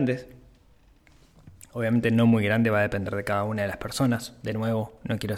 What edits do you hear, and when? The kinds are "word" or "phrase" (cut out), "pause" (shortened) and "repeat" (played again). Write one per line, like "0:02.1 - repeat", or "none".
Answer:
none